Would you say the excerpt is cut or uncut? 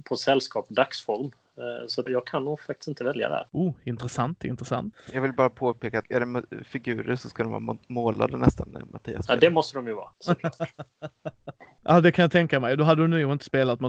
cut